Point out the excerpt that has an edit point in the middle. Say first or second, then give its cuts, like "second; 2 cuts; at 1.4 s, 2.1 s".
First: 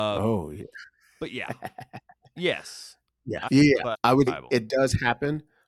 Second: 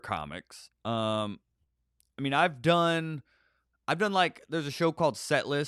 first; 3 cuts; at 3.5 s, 3.9 s, 4.3 s